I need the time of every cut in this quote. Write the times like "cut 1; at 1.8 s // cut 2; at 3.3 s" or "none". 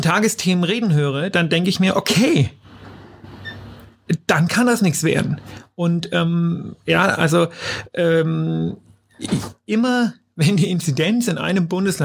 none